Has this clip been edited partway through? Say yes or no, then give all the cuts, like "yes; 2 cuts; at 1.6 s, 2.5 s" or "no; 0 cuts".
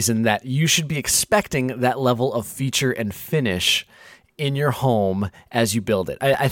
no; 0 cuts